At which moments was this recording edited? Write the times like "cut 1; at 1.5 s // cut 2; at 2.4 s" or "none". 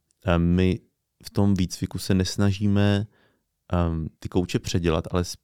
cut 1; at 4.1 s